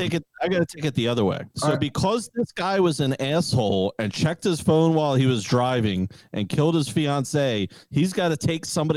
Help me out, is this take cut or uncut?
cut